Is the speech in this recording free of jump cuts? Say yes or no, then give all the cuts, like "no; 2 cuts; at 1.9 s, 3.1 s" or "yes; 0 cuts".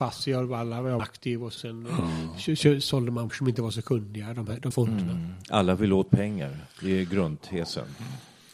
no; 5 cuts; at 1.0 s, 1.6 s, 3.3 s, 4.7 s, 6.1 s